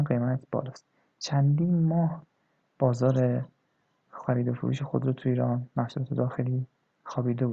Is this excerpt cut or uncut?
uncut